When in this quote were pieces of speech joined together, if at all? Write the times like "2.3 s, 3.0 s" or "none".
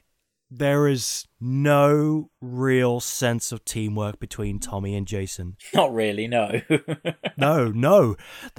2.4 s